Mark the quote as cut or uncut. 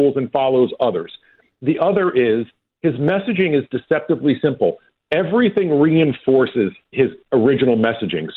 uncut